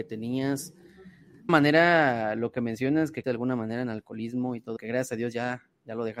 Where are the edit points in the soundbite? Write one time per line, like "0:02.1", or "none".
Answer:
0:01.5
0:03.2
0:04.8

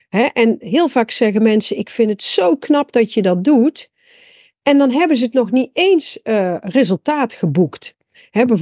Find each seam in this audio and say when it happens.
none

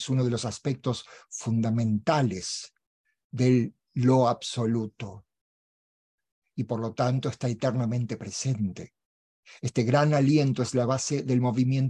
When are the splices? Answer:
none

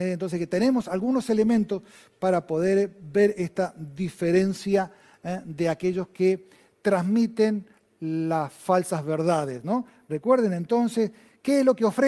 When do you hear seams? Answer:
none

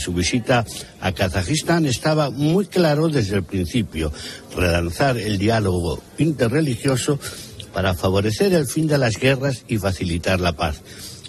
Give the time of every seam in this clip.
none

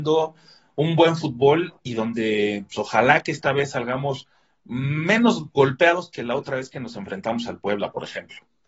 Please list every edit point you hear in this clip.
none

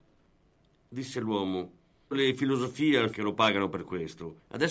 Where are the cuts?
0:02.1
0:03.1

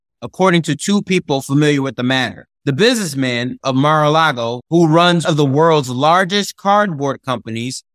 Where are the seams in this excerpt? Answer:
0:02.6
0:03.6
0:05.2

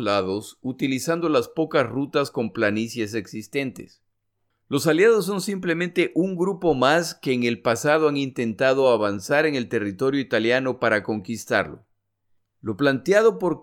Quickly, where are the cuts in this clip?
none

